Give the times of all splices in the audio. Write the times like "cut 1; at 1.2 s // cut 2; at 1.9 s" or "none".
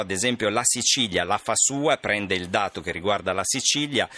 none